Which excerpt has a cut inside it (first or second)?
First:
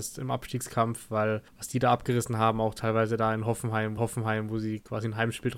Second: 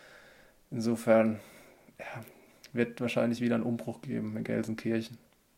first